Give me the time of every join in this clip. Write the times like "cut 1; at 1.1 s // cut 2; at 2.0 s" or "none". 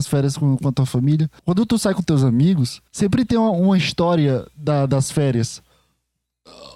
cut 1; at 1.4 s // cut 2; at 2.9 s